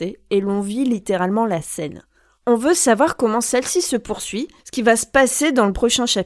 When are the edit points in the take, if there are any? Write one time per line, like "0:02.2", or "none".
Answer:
0:04.6